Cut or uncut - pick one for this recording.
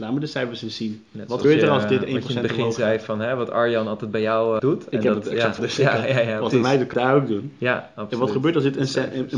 cut